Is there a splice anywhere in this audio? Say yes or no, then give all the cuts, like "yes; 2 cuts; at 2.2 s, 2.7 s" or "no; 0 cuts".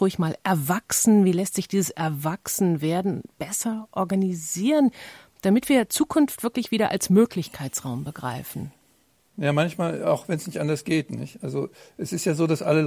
no; 0 cuts